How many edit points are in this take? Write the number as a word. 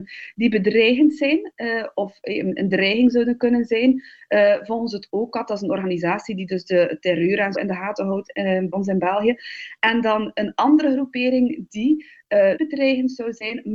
three